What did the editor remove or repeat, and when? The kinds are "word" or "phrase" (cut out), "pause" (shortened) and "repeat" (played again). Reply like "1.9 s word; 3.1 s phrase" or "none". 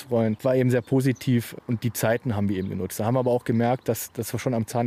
none